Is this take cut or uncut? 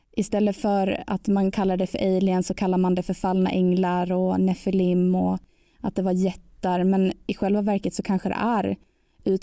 uncut